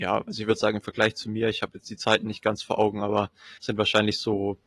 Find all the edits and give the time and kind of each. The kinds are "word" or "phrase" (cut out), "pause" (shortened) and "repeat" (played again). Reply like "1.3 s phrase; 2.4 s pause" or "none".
3.6 s pause